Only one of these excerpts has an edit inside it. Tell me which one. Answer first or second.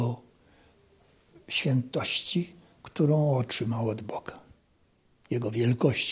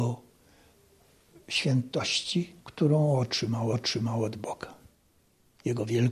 second